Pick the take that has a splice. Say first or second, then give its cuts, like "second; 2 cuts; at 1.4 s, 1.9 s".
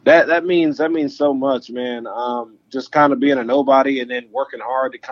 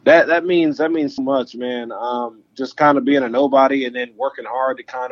second; 1 cut; at 1.2 s